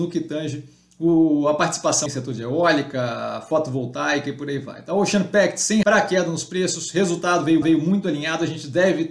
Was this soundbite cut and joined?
yes; 3 cuts; at 2.1 s, 5.8 s, 7.6 s

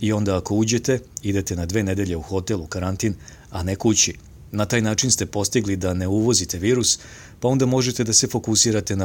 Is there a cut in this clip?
no; 0 cuts

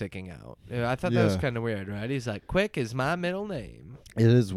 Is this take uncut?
yes; 0 cuts

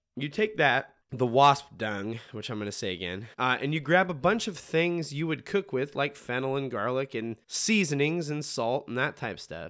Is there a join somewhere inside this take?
yes; 3 cuts; at 1.0 s, 3.3 s, 7.4 s

